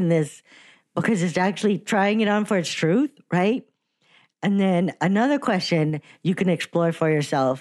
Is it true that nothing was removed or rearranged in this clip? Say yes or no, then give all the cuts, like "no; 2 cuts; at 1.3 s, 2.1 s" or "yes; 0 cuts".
yes; 0 cuts